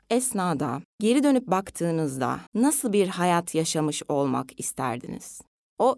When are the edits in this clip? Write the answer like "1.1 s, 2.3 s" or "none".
0.9 s, 2.5 s